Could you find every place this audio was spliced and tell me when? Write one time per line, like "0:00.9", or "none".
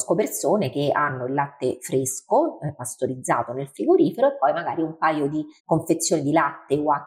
0:05.6

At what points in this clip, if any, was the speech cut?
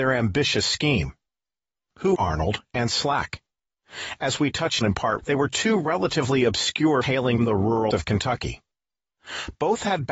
0:02.1
0:04.8
0:05.2
0:07.0
0:07.4
0:07.9

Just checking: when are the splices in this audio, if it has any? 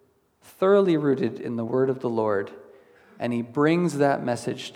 none

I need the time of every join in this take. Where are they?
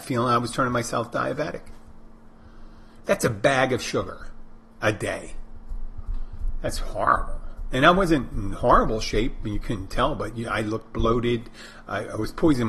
0:04.7

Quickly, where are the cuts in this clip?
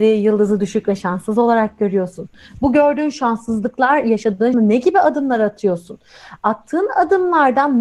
0:04.5

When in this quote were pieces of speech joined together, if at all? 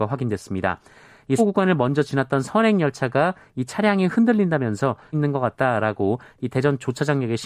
0:01.4
0:05.1

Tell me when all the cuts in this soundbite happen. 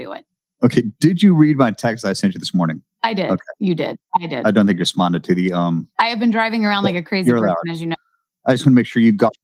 none

